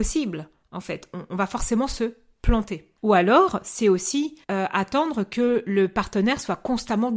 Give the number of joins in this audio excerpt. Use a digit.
2